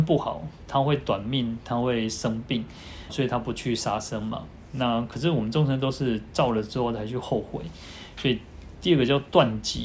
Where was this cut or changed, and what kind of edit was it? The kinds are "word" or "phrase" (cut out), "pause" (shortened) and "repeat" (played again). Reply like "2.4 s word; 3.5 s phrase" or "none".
3.1 s word